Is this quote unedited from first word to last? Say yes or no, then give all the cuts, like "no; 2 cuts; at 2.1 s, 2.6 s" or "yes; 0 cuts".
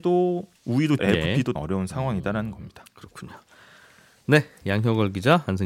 no; 2 cuts; at 1.0 s, 1.6 s